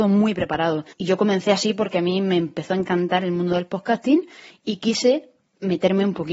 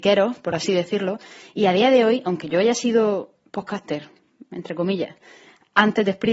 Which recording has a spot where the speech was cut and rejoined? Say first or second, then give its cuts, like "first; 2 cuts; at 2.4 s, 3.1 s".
first; 1 cut; at 0.9 s